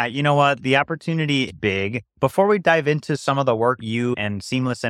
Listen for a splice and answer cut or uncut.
cut